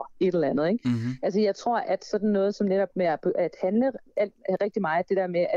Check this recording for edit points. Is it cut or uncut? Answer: uncut